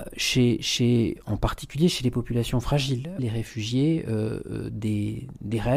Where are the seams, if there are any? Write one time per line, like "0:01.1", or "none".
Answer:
0:03.2